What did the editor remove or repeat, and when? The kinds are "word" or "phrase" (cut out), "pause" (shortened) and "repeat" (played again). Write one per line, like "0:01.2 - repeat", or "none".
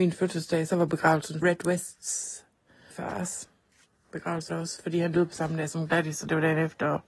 0:01.4 - word
0:02.9 - word
0:04.5 - word